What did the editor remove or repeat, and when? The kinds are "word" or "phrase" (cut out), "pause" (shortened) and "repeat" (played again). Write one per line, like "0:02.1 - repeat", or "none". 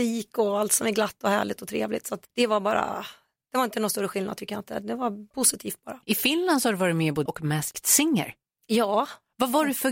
0:02.2 - pause
0:06.0 - pause
0:07.3 - word